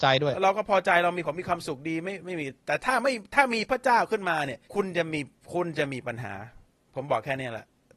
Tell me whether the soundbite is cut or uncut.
cut